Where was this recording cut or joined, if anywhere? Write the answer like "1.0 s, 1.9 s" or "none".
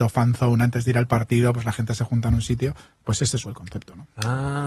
3.4 s